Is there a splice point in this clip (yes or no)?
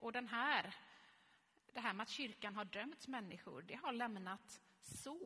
no